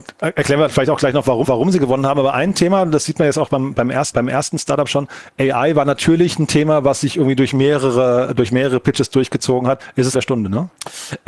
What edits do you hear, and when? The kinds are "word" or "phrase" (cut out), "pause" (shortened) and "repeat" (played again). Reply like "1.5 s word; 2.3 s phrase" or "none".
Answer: 1.4 s repeat; 4.1 s repeat; 10.1 s phrase

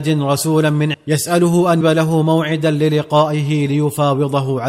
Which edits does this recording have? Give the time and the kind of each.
0.9 s word; 1.8 s word

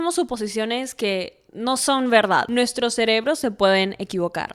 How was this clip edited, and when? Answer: 1.5 s pause

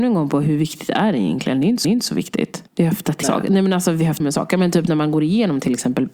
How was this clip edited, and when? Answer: 1.8 s repeat; 2.7 s pause; 3.2 s phrase; 4.2 s word

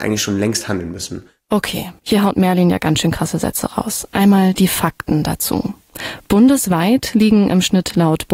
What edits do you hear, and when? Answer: 2.0 s pause

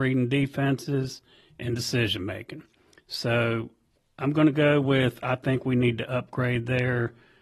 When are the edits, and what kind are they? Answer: none

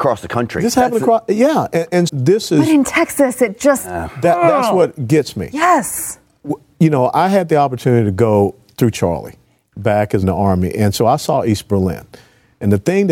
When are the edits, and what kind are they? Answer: 2.1 s word; 8.9 s word; 10.2 s phrase

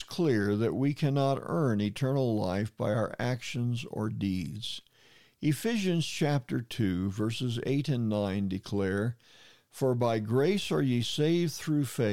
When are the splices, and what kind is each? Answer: none

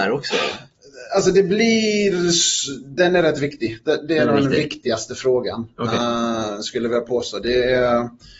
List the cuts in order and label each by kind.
5.7 s pause

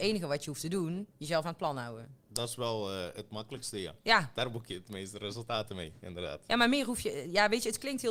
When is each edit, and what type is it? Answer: 2.2 s pause; 4.0 s pause

